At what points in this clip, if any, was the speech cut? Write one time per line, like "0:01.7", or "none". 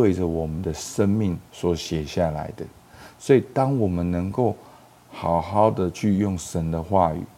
none